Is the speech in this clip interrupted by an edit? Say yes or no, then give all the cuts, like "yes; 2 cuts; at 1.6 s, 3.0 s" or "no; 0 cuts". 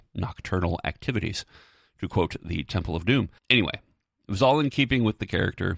yes; 1 cut; at 3.4 s